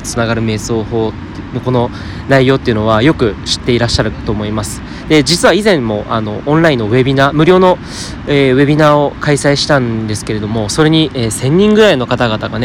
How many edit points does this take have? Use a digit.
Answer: 0